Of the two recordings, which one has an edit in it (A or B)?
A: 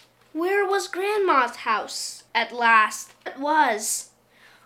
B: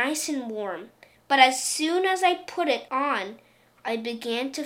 A